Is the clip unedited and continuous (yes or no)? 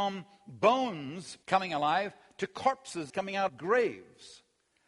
no